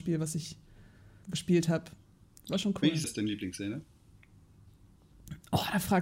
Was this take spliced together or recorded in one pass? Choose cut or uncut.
cut